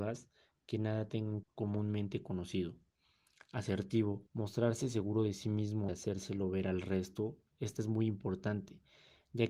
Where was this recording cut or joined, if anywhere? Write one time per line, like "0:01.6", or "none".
0:01.4
0:04.3
0:05.9
0:07.8